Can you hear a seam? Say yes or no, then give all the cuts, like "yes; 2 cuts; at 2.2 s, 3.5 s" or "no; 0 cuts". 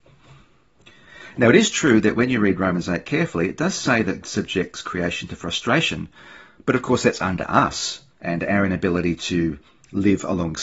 yes; 2 cuts; at 4.2 s, 8.1 s